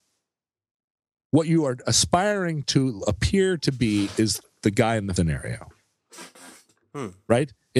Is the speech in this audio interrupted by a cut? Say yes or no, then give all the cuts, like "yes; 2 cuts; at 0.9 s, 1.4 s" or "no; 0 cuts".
yes; 1 cut; at 5.2 s